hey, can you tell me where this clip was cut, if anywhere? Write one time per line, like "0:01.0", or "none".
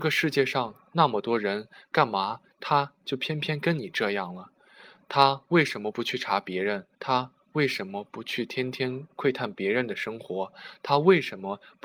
0:06.9